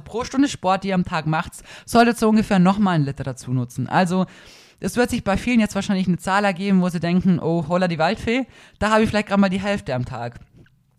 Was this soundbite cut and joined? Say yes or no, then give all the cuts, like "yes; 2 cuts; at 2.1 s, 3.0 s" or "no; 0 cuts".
no; 0 cuts